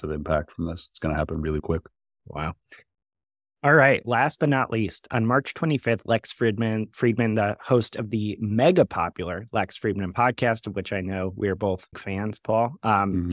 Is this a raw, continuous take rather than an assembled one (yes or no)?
no